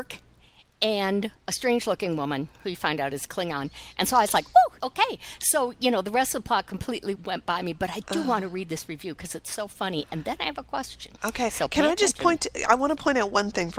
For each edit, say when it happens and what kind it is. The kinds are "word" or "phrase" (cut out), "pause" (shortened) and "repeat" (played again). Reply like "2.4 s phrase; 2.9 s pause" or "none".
1.4 s pause; 4.8 s word; 7.1 s word; 11.2 s pause